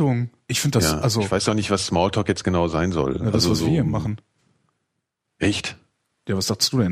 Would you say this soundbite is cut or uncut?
uncut